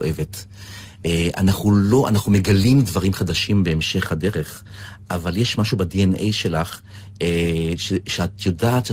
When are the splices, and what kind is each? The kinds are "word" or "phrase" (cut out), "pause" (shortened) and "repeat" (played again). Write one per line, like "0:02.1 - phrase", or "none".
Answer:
none